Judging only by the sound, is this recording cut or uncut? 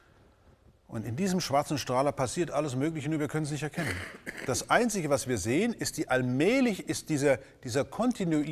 uncut